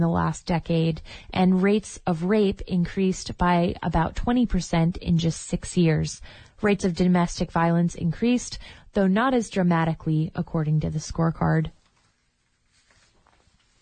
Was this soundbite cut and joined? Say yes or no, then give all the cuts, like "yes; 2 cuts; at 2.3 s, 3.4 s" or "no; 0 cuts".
no; 0 cuts